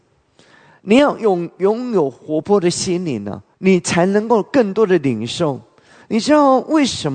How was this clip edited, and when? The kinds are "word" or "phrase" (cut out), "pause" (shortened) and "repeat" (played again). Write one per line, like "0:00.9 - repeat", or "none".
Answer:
0:03.5 - pause